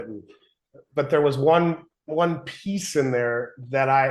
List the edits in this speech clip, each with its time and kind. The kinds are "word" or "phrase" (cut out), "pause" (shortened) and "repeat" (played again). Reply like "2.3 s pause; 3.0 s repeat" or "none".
none

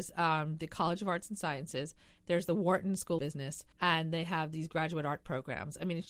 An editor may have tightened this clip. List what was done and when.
3.2 s word; 3.7 s pause

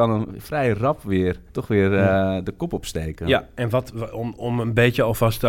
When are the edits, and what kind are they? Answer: 1.5 s pause

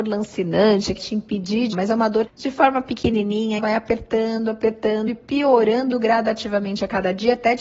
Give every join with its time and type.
1.0 s word; 1.7 s word; 2.3 s phrase; 3.6 s phrase; 5.1 s word

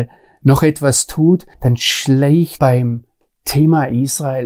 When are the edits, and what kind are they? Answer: 1.5 s pause; 2.6 s word

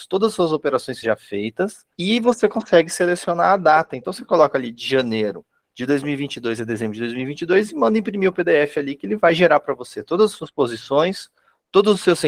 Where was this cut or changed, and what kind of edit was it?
1.0 s word; 1.9 s pause

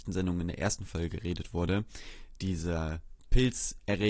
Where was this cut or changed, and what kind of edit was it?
none

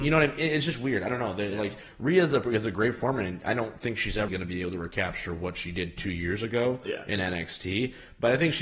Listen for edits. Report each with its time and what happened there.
4.3 s word

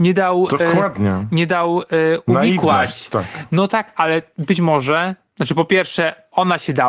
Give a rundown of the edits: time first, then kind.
none

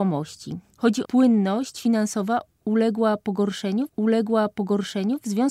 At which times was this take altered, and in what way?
1.0 s phrase; 3.9 s repeat

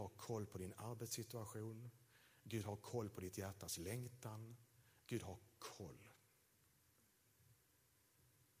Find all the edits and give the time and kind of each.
none

